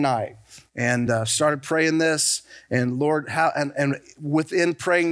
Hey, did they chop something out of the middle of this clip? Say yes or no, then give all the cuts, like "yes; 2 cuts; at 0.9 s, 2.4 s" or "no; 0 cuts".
no; 0 cuts